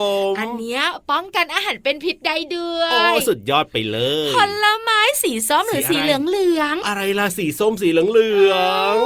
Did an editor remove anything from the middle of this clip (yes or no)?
yes